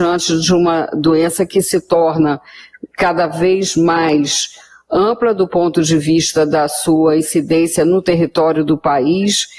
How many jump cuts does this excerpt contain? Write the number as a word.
zero